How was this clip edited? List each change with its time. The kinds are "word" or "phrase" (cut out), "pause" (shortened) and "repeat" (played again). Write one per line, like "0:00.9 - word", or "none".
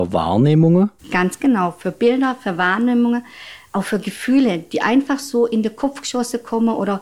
0:01.0 - pause

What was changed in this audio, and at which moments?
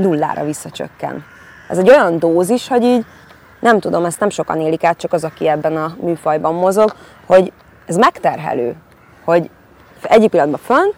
none

